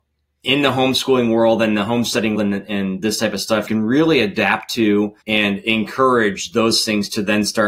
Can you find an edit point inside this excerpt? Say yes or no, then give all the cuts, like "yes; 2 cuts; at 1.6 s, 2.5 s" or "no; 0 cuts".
yes; 3 cuts; at 2.3 s, 3.7 s, 5.2 s